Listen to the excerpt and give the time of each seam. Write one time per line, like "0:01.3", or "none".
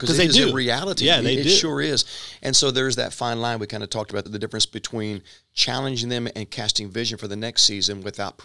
0:04.3